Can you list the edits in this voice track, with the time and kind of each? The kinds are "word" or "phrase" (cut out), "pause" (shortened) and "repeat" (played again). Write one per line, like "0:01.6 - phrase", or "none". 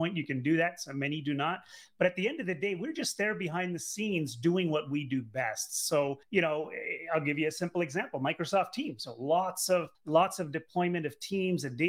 0:06.2 - pause
0:09.9 - pause